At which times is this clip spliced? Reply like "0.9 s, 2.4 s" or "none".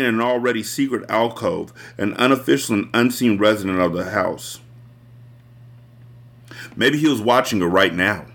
none